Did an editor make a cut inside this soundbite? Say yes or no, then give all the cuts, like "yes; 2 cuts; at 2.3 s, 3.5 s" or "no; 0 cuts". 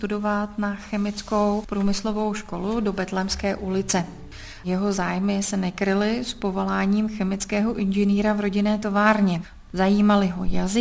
no; 0 cuts